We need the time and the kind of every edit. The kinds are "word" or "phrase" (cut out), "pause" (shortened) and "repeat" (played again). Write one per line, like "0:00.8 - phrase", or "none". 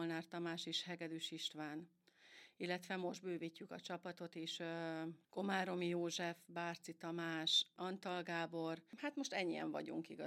0:08.9 - pause